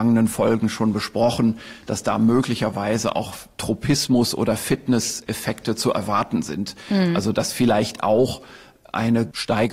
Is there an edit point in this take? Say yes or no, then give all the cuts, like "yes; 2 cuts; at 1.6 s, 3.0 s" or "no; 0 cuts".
no; 0 cuts